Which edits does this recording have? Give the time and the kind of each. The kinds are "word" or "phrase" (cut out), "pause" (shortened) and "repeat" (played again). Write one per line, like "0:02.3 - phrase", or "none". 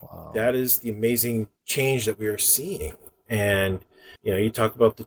0:01.5 - pause
0:04.2 - pause